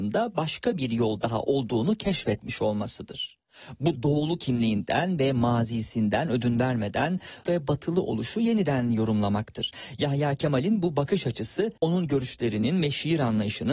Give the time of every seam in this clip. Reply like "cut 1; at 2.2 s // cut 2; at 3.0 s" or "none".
cut 1; at 4.0 s // cut 2; at 7.4 s // cut 3; at 11.8 s